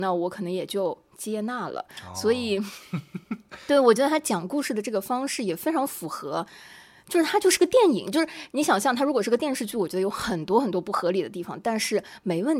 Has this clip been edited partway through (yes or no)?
no